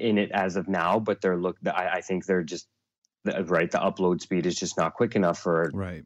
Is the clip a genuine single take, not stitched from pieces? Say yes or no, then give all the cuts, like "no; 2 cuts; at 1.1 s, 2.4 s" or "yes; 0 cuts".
yes; 0 cuts